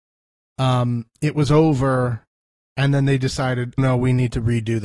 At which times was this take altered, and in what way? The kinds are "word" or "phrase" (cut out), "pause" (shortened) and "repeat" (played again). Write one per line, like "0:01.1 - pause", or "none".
0:03.8 - word